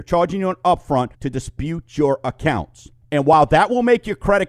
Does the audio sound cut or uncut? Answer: cut